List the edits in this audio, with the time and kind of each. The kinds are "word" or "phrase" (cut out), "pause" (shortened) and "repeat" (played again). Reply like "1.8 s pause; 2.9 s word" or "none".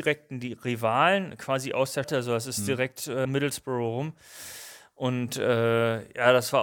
2.0 s word; 3.2 s word